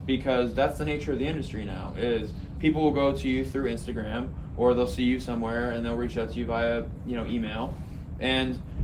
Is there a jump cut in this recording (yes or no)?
no